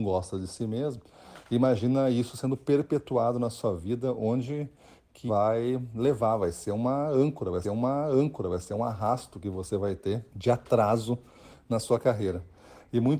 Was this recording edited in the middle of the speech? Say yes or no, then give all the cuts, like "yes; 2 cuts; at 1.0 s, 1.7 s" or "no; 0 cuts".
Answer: yes; 3 cuts; at 5.3 s, 7.6 s, 10.3 s